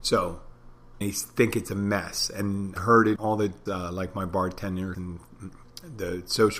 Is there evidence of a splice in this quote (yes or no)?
yes